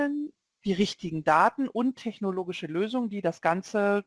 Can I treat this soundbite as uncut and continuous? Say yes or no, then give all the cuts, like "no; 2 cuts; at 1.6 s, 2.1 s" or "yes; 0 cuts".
yes; 0 cuts